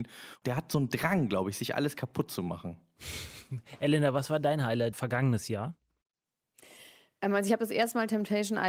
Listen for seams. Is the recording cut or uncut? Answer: uncut